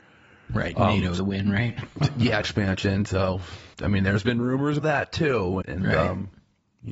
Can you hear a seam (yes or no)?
yes